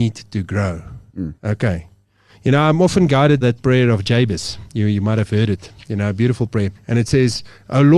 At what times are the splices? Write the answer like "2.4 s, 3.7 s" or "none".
1.4 s, 3.4 s, 6.7 s